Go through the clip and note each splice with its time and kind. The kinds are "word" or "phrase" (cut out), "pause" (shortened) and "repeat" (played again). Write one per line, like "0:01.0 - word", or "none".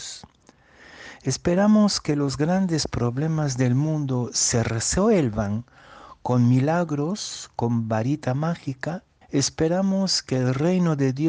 0:09.2 - pause